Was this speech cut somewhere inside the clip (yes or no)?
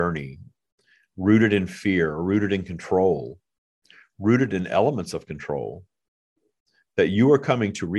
no